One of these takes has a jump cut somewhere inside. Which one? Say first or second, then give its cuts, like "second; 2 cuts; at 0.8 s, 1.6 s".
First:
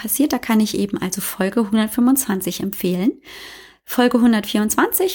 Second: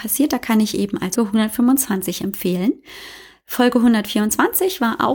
second; 1 cut; at 1.2 s